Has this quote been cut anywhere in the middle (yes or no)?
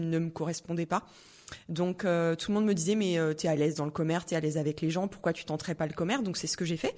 no